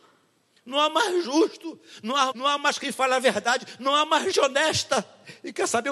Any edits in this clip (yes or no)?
yes